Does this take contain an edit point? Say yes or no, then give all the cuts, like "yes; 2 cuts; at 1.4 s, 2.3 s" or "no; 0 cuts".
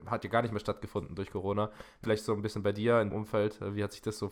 yes; 2 cuts; at 2.0 s, 3.1 s